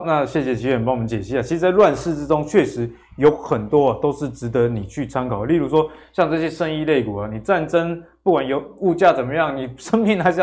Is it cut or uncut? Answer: uncut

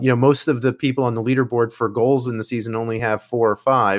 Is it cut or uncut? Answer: uncut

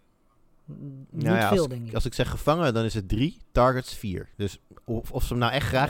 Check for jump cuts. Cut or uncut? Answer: uncut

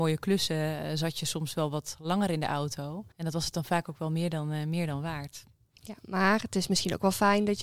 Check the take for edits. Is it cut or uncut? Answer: cut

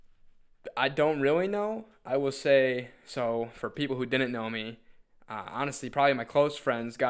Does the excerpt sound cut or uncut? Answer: uncut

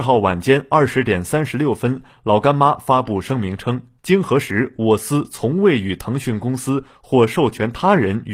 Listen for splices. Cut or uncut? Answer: cut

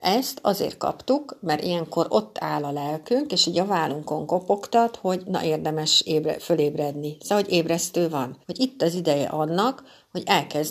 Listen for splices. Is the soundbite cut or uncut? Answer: cut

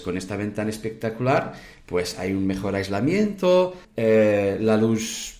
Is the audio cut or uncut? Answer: cut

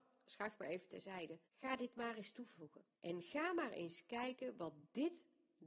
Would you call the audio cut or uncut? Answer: cut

